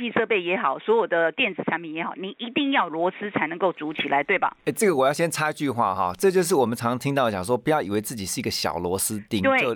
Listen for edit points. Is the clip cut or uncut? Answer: cut